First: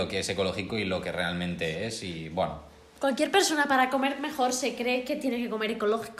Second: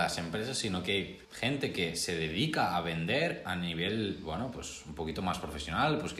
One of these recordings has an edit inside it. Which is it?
second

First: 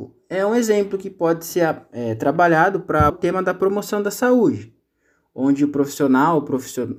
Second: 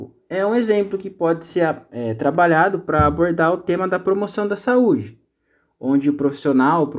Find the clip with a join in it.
first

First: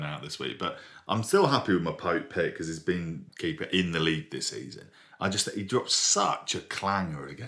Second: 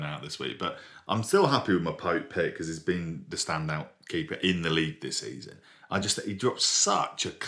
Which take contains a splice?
first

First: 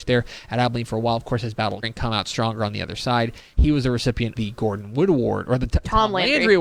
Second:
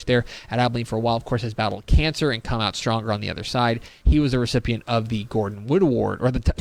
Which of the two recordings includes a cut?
first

